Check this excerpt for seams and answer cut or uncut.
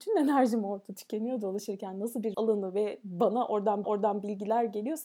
cut